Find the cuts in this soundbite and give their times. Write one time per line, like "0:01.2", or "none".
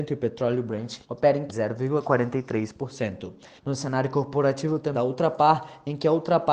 0:01.0
0:01.5
0:03.6
0:04.9